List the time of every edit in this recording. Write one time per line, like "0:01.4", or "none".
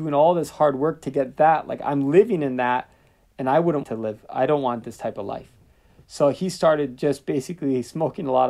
0:03.8
0:07.0